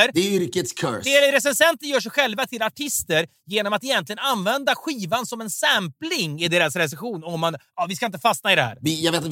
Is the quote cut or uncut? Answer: uncut